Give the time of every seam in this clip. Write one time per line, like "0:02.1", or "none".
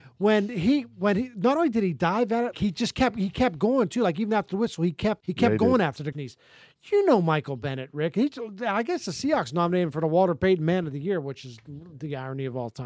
0:02.5
0:05.2
0:06.1